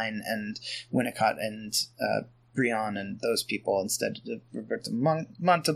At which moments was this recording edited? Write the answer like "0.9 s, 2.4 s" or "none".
none

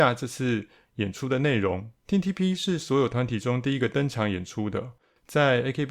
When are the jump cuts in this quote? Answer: 2.0 s

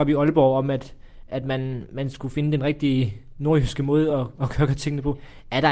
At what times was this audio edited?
none

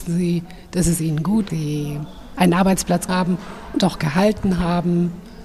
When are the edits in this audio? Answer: 1.5 s, 3.1 s

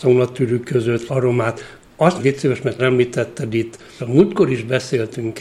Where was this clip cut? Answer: 1.1 s, 2.2 s, 2.8 s, 4.0 s

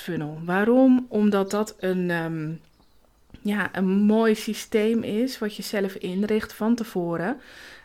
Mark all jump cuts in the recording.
none

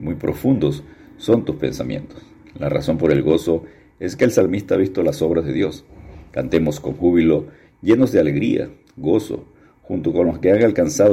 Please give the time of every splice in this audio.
none

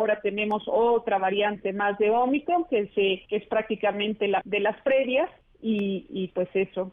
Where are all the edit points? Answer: 3.3 s, 4.4 s

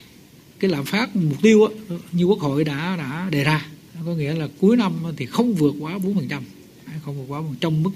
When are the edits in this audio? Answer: none

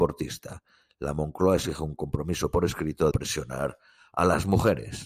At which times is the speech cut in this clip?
3.1 s

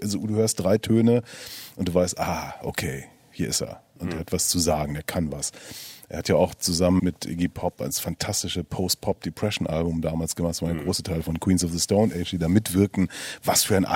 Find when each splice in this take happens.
7.0 s

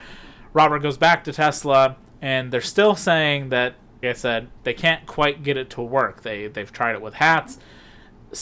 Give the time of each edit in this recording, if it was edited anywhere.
4.0 s

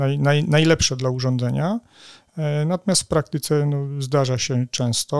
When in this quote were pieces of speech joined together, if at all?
none

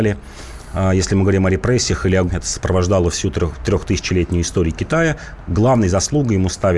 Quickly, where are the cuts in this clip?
2.3 s

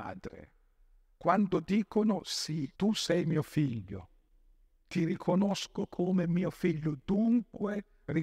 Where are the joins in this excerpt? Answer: 2.8 s

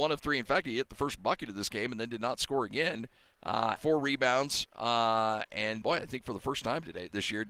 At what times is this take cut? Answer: 3.8 s, 5.8 s

